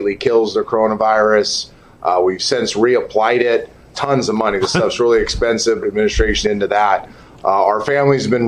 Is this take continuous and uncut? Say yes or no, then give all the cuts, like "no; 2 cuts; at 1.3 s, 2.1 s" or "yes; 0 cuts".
no; 3 cuts; at 3.9 s, 5.8 s, 6.4 s